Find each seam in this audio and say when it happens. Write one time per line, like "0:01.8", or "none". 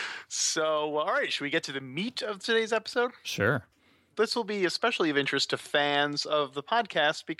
none